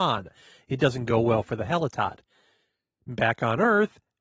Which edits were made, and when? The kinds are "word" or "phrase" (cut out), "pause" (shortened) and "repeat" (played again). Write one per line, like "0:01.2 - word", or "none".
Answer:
none